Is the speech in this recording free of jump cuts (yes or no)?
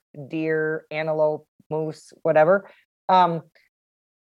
yes